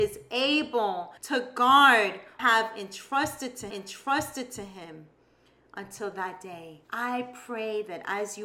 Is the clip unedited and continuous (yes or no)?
no